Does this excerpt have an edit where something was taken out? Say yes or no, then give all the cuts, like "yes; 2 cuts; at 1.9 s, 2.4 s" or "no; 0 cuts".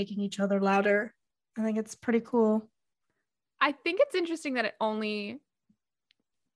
no; 0 cuts